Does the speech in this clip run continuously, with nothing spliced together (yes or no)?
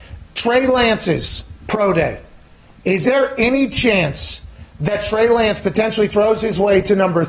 yes